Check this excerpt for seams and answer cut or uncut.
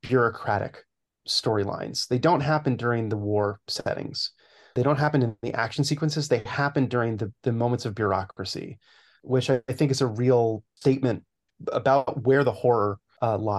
uncut